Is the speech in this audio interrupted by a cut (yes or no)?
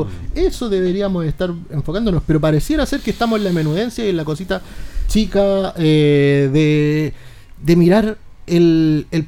no